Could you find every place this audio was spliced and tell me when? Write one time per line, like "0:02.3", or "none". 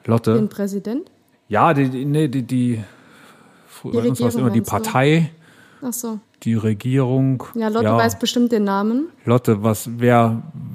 0:01.3
0:03.9
0:06.2